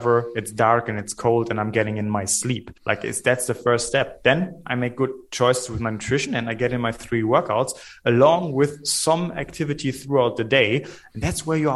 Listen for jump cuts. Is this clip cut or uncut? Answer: cut